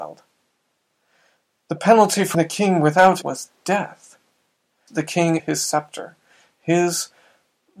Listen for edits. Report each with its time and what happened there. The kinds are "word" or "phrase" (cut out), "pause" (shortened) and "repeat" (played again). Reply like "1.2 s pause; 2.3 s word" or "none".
2.3 s word; 3.2 s word; 4.9 s word; 5.4 s word